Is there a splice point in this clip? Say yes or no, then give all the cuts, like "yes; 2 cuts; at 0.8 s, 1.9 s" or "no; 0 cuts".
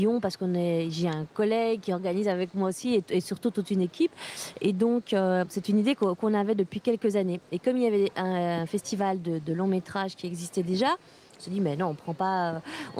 no; 0 cuts